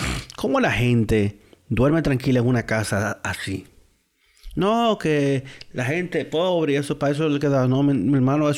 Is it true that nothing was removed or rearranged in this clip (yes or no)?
yes